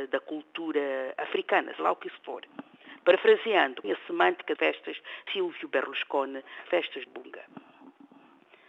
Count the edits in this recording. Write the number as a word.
six